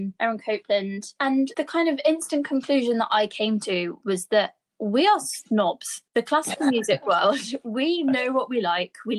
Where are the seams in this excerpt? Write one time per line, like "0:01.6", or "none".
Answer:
0:06.1